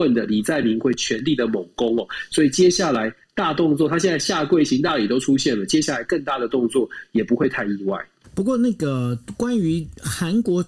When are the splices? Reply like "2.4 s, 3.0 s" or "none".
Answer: 8.2 s